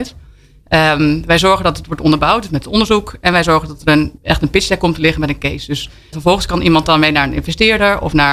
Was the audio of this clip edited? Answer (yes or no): yes